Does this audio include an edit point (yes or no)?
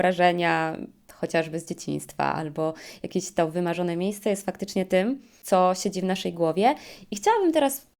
no